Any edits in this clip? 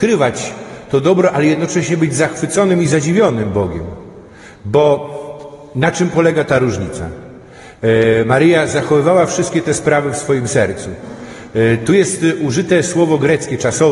no; 0 cuts

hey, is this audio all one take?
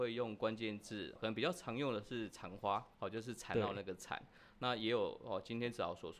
no; 2 cuts; at 1.2 s, 2.9 s

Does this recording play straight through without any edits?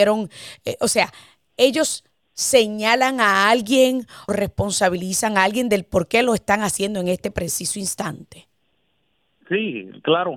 no; 1 cut; at 4.3 s

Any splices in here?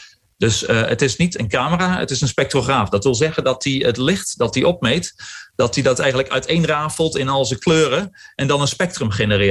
no; 0 cuts

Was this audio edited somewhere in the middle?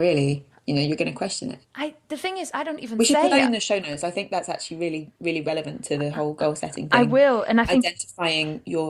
yes; 2 cuts; at 1.6 s, 5.2 s

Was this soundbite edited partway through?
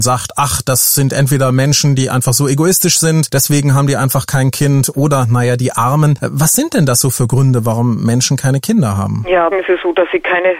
yes; 1 cut; at 9.5 s

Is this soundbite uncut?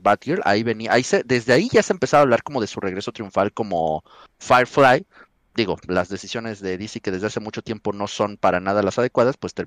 yes; 0 cuts

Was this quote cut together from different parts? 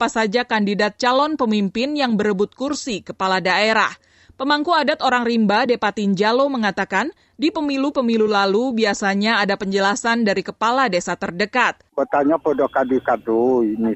no; 0 cuts

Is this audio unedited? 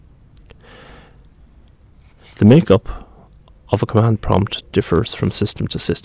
yes; 0 cuts

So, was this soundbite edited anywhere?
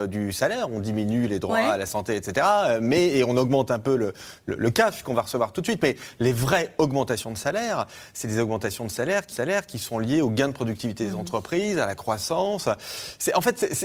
yes; 1 cut; at 9.3 s

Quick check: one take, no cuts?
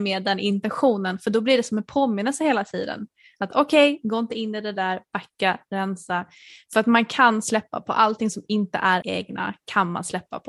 no; 1 cut; at 9.0 s

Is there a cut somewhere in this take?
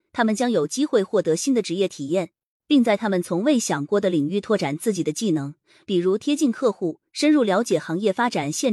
no; 0 cuts

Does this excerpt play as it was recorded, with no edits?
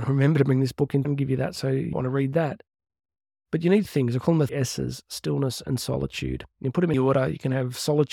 no; 6 cuts; at 1.0 s, 1.9 s, 3.8 s, 4.5 s, 5.0 s, 6.9 s

